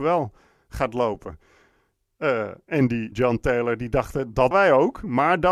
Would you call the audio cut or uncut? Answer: cut